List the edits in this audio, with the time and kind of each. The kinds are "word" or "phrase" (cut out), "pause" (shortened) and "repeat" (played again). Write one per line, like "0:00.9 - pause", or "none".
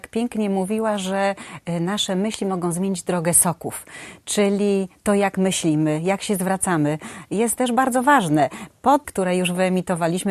0:09.0 - word